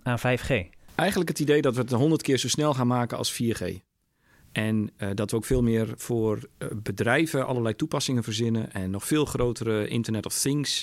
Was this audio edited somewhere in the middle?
no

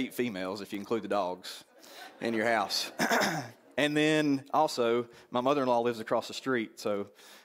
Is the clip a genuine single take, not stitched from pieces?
yes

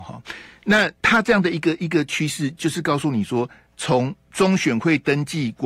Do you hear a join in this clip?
yes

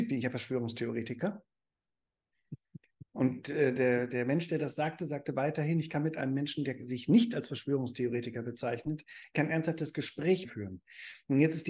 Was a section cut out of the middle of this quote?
yes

